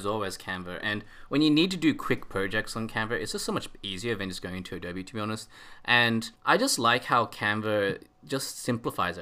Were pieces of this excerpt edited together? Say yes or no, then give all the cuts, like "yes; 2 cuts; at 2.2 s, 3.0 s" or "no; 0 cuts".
yes; 1 cut; at 6.3 s